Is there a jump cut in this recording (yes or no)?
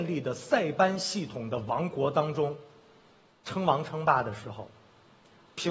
no